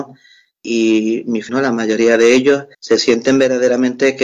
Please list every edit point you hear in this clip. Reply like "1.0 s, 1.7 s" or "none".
1.5 s, 2.7 s